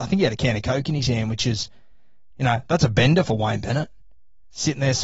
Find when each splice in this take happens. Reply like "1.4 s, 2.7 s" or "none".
none